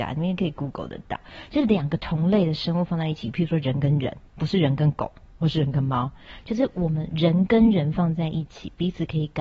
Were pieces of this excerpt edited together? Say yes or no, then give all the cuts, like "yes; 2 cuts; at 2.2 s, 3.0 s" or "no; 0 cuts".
yes; 1 cut; at 4.3 s